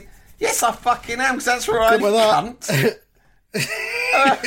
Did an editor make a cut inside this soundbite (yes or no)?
yes